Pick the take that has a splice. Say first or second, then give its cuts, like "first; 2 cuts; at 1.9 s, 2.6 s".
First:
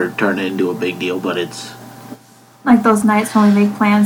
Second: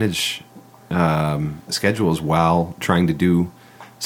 second; 1 cut; at 1.7 s